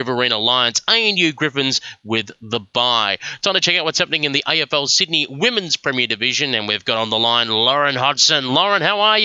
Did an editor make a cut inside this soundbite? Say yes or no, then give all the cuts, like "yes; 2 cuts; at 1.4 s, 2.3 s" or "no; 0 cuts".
no; 0 cuts